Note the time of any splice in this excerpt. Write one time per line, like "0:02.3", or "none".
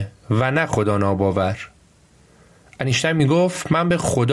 none

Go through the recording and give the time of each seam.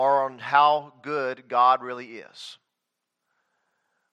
none

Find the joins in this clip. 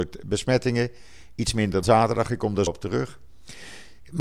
0:01.8
0:02.7

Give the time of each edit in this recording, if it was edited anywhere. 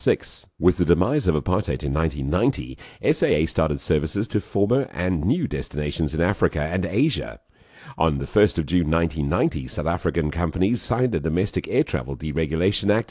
none

